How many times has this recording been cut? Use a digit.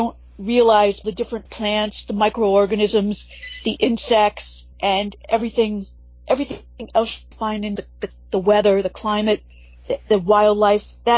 6